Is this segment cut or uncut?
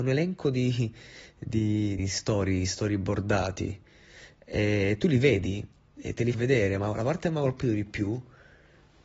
cut